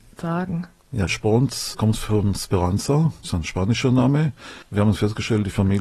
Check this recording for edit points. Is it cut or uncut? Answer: cut